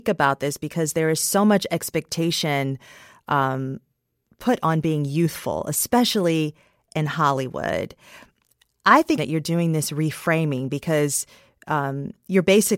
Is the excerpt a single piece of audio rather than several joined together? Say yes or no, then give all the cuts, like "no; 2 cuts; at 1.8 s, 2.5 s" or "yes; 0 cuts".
no; 1 cut; at 9.2 s